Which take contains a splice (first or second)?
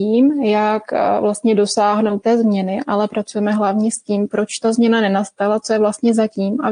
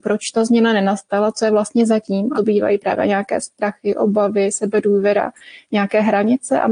second